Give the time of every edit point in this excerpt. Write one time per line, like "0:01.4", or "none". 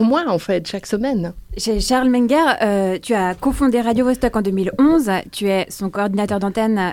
0:01.5